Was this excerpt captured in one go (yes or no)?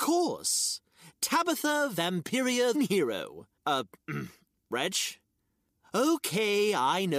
no